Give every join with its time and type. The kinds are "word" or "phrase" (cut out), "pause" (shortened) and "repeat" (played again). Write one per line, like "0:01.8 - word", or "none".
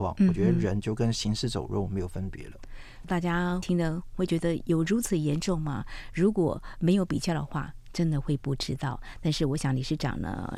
0:03.0 - phrase